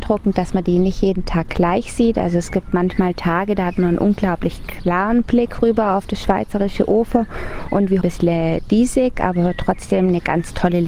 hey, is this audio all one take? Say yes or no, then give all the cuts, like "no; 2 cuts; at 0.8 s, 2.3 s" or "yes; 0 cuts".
no; 1 cut; at 8.0 s